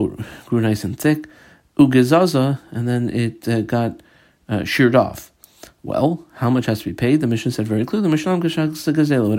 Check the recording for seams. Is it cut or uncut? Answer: uncut